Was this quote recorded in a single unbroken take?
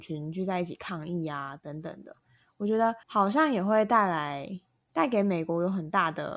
no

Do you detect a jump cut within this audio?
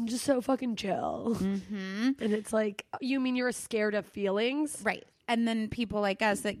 no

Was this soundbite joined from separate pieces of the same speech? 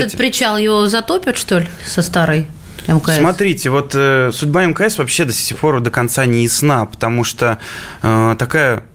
no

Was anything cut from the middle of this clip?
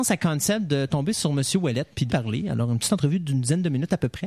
yes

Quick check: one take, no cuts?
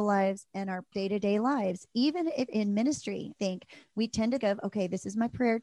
no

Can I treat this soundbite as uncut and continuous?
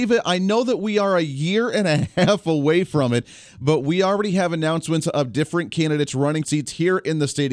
no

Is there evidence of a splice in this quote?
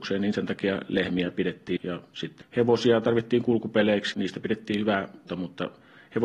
yes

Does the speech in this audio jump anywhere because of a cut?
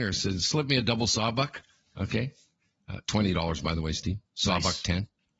no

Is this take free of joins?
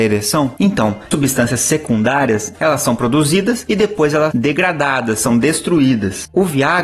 no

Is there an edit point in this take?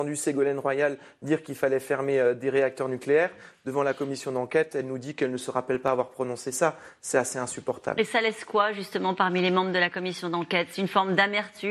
no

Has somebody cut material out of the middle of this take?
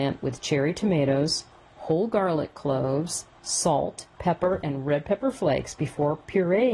yes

